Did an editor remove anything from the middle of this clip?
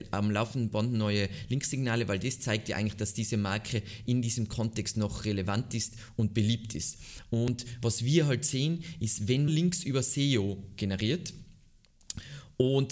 yes; 1 cut; at 9.5 s

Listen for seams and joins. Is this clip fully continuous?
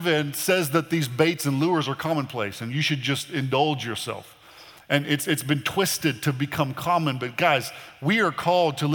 no; 1 cut; at 4.8 s

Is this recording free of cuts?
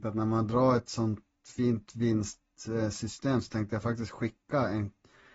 yes; 0 cuts

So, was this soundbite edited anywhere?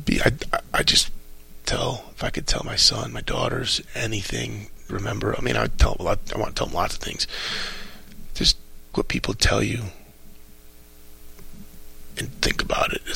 yes; 3 cuts; at 1.6 s, 4.9 s, 8.9 s

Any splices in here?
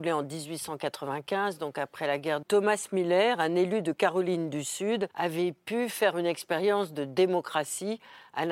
yes; 2 cuts; at 2.4 s, 5.1 s

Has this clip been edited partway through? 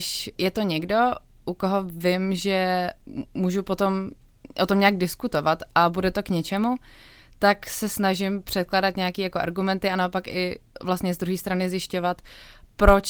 no; 0 cuts

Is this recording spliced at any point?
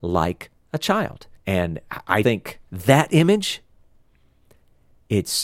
yes; 3 cuts; at 1.4 s, 2.2 s, 2.6 s

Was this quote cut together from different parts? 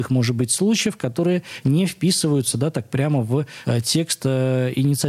no; 0 cuts

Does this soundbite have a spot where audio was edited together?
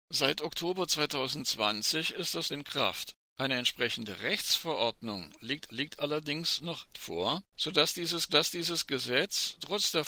yes; 5 cuts; at 2.5 s, 3.3 s, 5.7 s, 6.9 s, 8.3 s

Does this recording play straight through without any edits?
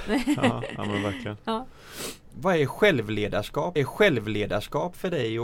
no; 1 cut; at 3.8 s

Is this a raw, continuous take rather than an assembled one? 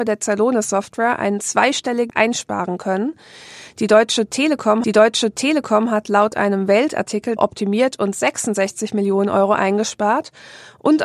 no; 3 cuts; at 2.1 s, 4.8 s, 7.4 s

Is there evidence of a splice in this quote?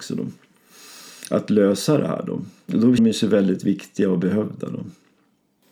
yes; 1 cut; at 3.0 s

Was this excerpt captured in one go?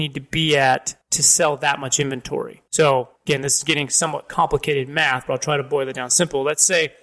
no; 2 cuts; at 1.0 s, 3.2 s

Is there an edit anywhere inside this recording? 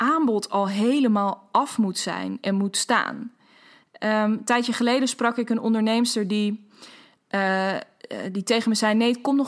no; 0 cuts

